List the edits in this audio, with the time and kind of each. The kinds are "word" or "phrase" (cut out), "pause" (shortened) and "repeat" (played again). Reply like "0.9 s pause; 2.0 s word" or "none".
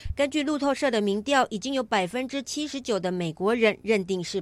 none